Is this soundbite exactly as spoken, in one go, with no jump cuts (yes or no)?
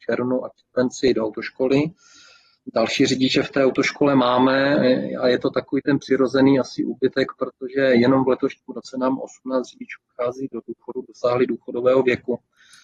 yes